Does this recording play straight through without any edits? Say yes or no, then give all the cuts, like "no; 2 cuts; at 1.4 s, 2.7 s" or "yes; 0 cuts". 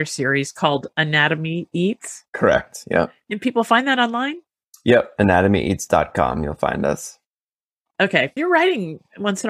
no; 2 cuts; at 2.3 s, 8.4 s